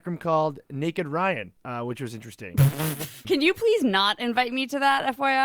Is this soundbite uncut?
no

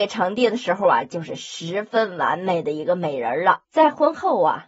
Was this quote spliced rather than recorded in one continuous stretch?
yes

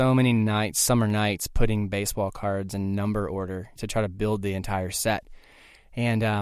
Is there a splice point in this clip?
yes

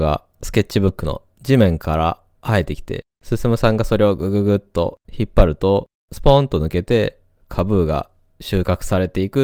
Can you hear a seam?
yes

